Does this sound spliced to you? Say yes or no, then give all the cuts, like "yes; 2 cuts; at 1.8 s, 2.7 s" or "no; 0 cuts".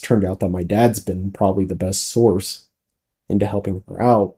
no; 0 cuts